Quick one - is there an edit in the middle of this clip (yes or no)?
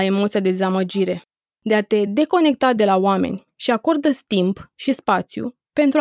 no